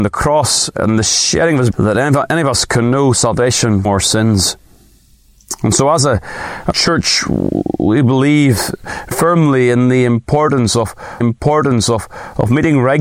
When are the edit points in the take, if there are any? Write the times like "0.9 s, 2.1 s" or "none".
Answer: 1.7 s, 3.8 s, 6.7 s, 9.1 s, 11.2 s

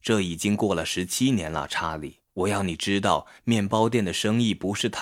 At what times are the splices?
2.3 s

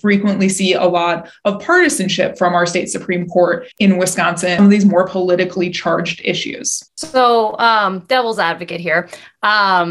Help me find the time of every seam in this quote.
3.7 s, 4.6 s, 6.9 s

